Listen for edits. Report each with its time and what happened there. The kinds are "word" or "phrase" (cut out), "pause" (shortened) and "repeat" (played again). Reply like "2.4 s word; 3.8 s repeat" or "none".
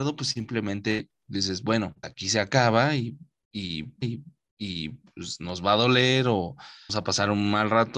2.0 s word; 4.0 s repeat; 6.9 s word